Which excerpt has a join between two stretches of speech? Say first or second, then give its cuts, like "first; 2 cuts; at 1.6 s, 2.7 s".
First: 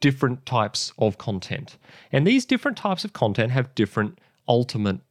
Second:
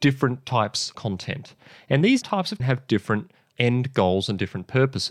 second; 4 cuts; at 0.9 s, 2.2 s, 2.6 s, 3.5 s